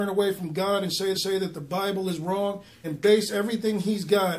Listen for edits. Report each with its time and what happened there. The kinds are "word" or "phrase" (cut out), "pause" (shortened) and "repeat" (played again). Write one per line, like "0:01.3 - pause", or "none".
0:01.1 - repeat
0:02.8 - word